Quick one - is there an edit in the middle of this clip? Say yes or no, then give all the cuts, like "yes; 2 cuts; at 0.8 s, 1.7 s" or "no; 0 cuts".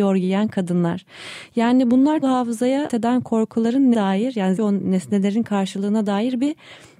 yes; 4 cuts; at 2.2 s, 2.9 s, 3.9 s, 4.6 s